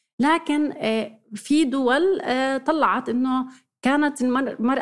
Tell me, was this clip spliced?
no; 0 cuts

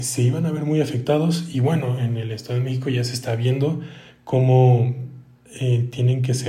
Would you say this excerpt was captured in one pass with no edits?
yes; 0 cuts

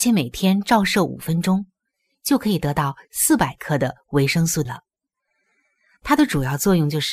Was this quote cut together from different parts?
yes; 1 cut; at 4.7 s

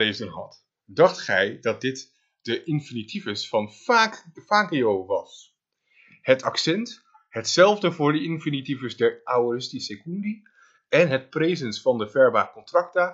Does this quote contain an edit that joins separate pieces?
no; 0 cuts

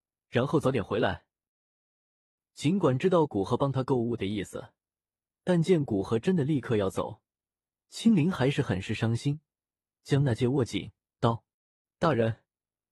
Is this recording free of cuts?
yes; 0 cuts

